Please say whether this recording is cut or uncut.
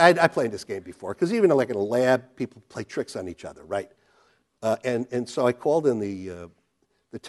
uncut